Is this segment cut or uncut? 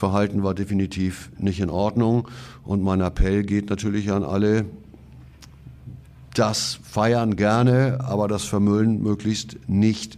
uncut